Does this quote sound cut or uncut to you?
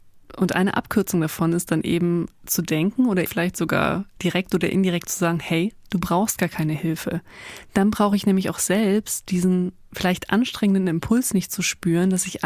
cut